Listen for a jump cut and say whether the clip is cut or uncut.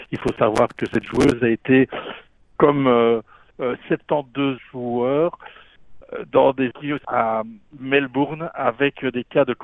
cut